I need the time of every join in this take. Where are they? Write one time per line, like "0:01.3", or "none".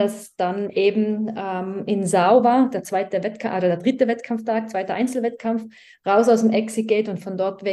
none